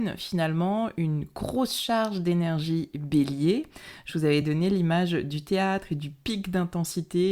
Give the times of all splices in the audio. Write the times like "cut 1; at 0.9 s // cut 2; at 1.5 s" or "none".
none